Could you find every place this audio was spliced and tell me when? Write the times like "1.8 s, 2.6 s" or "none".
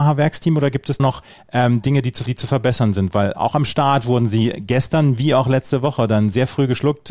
1.0 s, 2.3 s